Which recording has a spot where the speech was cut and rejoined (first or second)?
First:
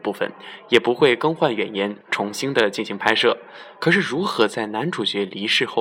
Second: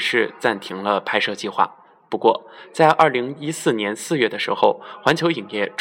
first